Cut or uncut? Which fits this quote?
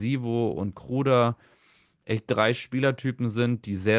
uncut